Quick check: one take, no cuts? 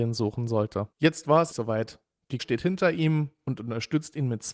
no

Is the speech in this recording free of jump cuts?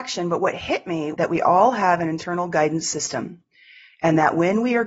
no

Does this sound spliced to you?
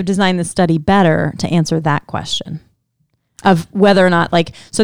no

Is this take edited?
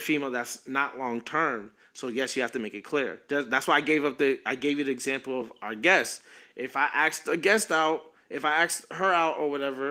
no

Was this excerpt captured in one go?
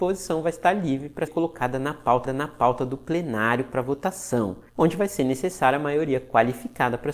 no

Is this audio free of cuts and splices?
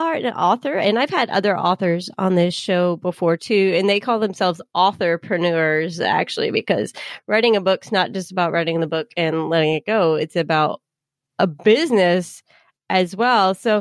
yes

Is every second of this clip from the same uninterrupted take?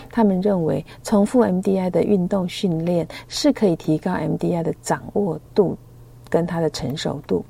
no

